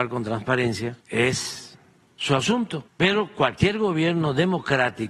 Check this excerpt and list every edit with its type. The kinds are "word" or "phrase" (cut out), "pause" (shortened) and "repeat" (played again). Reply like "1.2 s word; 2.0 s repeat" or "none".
1.0 s pause; 2.9 s pause